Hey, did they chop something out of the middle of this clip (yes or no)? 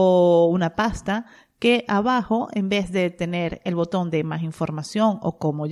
no